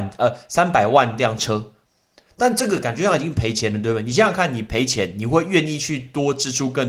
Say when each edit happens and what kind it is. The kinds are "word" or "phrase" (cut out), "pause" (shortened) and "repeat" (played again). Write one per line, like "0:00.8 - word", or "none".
none